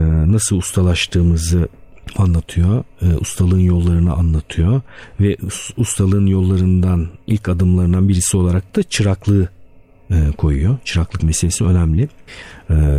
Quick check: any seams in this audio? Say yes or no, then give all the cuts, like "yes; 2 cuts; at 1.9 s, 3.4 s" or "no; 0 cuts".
no; 0 cuts